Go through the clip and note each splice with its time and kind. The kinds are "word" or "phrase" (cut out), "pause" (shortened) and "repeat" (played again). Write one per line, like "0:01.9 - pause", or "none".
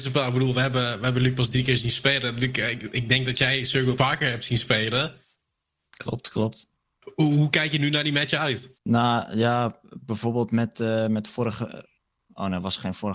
0:04.0 - word
0:08.8 - pause